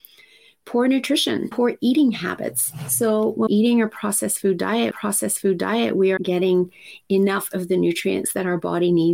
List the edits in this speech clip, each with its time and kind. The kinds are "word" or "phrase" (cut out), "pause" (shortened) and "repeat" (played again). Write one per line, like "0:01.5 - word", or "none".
0:01.5 - word
0:03.5 - word
0:04.9 - repeat
0:06.2 - word